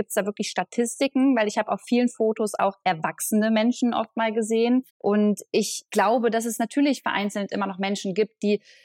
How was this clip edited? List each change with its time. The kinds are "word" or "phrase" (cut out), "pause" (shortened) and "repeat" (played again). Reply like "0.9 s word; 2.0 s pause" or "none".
4.9 s pause